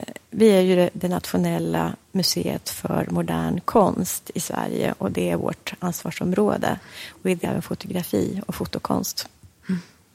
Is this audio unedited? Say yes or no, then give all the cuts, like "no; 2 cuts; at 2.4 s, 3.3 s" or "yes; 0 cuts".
no; 1 cut; at 7.4 s